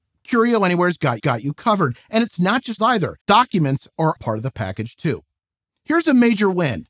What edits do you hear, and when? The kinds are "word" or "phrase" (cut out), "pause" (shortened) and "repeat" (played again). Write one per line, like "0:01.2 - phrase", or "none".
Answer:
0:01.2 - repeat
0:02.8 - phrase
0:03.2 - pause
0:04.2 - word